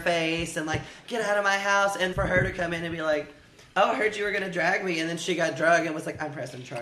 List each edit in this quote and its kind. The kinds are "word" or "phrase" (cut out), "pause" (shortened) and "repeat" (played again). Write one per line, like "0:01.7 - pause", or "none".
0:02.1 - word